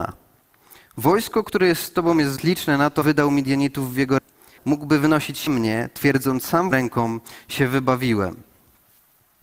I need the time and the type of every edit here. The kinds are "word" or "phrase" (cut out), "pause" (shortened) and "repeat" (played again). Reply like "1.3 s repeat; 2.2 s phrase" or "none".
2.4 s word; 3.0 s word; 4.2 s word; 4.6 s word; 5.5 s word; 6.7 s word